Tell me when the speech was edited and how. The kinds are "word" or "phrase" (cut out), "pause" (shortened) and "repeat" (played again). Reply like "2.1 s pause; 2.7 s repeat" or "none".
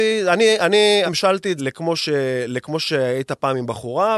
1.1 s word; 1.6 s word